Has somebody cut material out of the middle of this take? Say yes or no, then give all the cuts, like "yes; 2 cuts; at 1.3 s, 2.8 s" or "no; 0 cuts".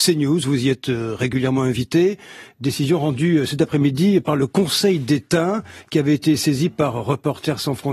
no; 0 cuts